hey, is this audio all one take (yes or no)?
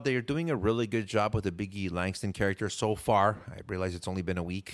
yes